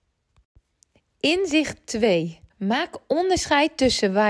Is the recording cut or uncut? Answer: cut